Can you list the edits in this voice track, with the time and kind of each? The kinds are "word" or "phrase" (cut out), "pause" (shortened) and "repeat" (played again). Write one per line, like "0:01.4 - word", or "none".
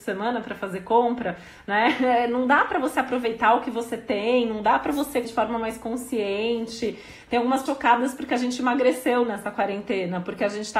0:05.2 - word
0:07.7 - word